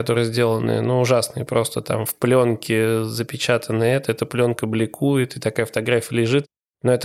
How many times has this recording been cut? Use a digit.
0